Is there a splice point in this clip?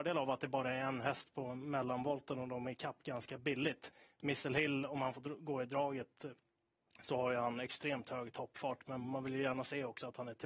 no; 0 cuts

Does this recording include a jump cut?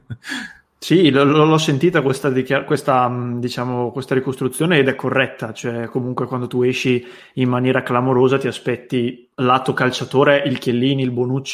no; 0 cuts

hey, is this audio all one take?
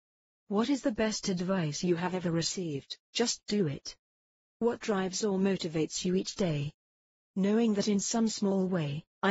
no; 1 cut; at 3.0 s

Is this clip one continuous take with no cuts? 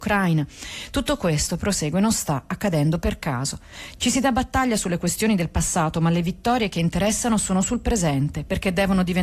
yes; 0 cuts

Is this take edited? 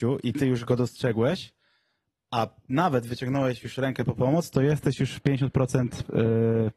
no; 0 cuts

